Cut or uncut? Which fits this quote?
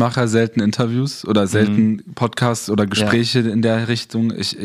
uncut